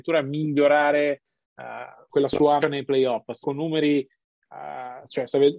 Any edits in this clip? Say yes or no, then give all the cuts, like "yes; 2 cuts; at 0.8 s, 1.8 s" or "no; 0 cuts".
yes; 3 cuts; at 2.1 s, 2.6 s, 3.4 s